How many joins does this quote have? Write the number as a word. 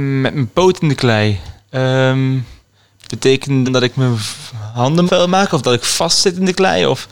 three